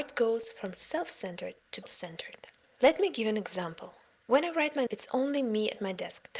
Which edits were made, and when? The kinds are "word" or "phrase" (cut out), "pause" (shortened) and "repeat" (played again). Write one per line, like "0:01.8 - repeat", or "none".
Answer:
0:01.8 - word
0:04.9 - word